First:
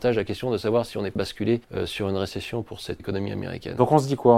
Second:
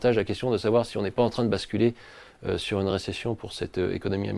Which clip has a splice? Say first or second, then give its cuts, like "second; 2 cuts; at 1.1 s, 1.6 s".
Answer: first; 3 cuts; at 1.2 s, 1.6 s, 3.0 s